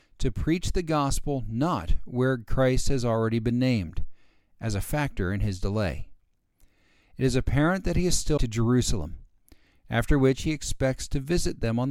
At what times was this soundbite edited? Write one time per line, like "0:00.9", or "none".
0:08.4